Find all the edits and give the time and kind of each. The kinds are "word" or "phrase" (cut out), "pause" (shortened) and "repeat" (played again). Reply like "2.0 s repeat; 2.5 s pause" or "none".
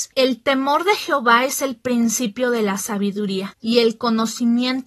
none